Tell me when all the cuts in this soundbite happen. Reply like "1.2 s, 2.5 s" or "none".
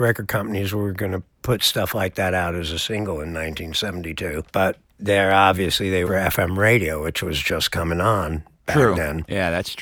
4.5 s, 6.1 s